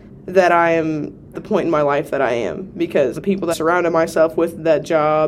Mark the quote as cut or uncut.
cut